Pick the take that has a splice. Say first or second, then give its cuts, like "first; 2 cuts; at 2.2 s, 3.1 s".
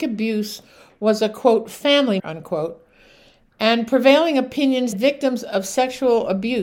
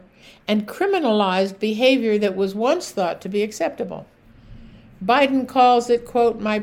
first; 2 cuts; at 2.2 s, 4.9 s